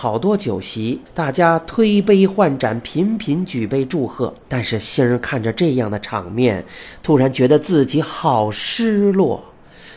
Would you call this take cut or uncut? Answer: cut